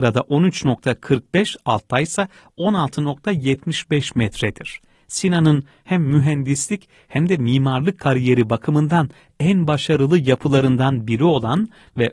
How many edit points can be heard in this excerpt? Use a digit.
0